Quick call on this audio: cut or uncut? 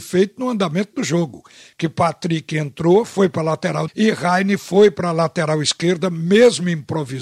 cut